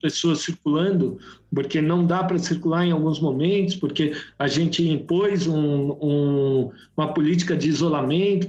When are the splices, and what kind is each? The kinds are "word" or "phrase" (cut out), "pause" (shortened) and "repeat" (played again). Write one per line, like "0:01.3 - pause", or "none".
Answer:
none

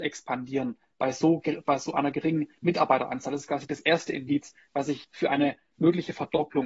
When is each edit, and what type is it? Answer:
0:02.6 - pause
0:05.0 - phrase

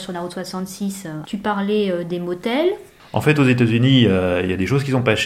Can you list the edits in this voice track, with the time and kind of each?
0:01.2 - word

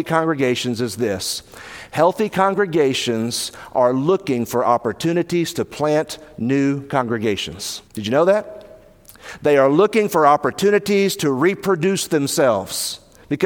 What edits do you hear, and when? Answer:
0:07.9 - pause

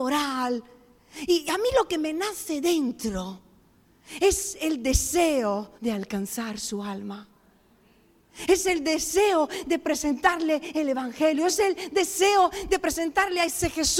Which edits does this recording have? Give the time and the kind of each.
0:05.8 - pause

